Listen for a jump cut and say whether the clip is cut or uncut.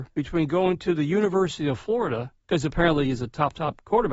cut